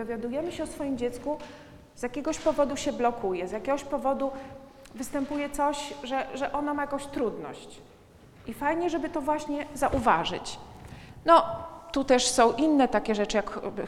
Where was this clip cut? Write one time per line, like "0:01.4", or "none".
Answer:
none